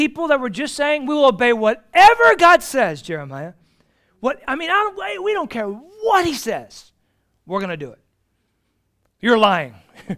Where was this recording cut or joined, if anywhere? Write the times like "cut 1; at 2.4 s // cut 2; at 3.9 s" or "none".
none

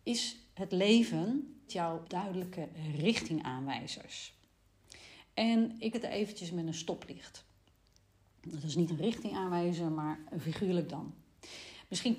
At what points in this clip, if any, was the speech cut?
cut 1; at 1.7 s // cut 2; at 2.0 s // cut 3; at 5.9 s // cut 4; at 8.9 s

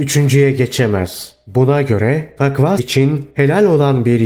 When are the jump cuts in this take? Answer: cut 1; at 2.8 s

